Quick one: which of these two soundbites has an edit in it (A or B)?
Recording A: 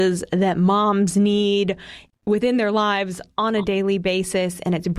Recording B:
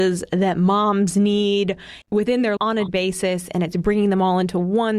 B